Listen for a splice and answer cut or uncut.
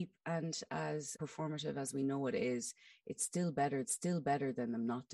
cut